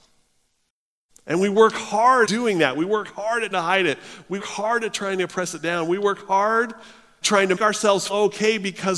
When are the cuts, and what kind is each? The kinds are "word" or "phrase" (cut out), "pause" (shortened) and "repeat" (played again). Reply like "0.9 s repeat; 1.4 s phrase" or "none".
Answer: 2.2 s word; 3.5 s word; 4.4 s word; 7.2 s word; 7.6 s word; 8.1 s word

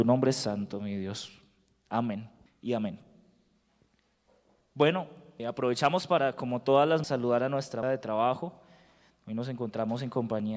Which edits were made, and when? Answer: 2.5 s pause; 5.4 s word; 7.0 s word; 7.8 s word

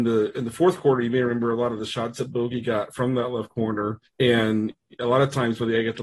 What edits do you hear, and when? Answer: 4.1 s pause

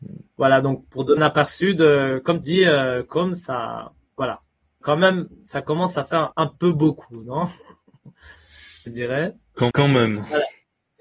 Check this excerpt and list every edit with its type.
1.2 s word; 2.4 s word; 4.8 s word; 6.3 s word; 8.9 s word; 9.7 s word

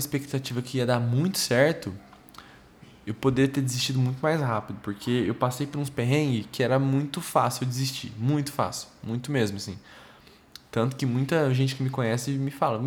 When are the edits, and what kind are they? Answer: none

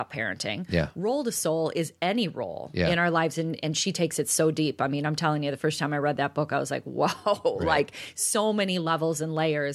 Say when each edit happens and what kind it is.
none

